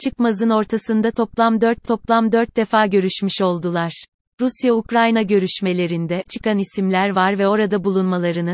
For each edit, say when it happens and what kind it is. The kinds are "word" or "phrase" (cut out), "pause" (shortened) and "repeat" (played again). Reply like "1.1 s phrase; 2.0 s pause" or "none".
1.8 s repeat; 6.3 s word